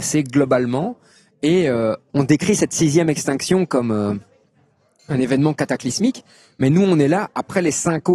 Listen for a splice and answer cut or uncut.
uncut